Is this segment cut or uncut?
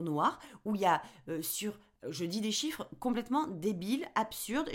uncut